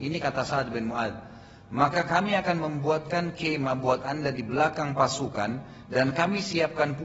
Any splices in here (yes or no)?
no